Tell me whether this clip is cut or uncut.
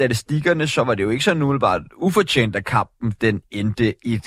uncut